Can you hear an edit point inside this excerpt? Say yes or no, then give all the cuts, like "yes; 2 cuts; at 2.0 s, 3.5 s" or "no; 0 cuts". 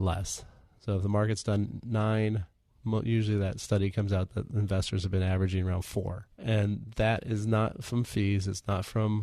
no; 0 cuts